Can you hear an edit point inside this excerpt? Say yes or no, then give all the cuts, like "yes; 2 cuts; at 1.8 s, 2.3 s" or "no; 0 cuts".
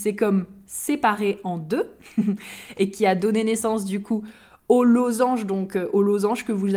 no; 0 cuts